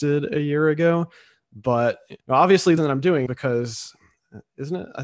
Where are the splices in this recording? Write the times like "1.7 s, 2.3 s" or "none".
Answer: 2.2 s, 2.8 s, 3.3 s